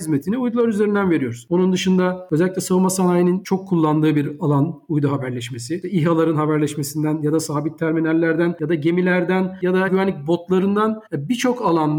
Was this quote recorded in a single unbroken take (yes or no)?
no